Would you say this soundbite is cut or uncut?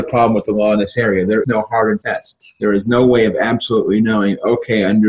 cut